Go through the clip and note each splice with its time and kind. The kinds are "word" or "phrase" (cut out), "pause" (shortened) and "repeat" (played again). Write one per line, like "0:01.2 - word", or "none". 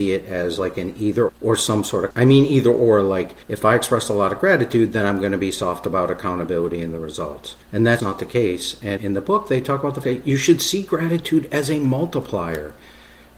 0:01.3 - word
0:02.1 - word
0:03.4 - pause
0:07.6 - pause
0:08.0 - word
0:09.0 - word
0:10.0 - word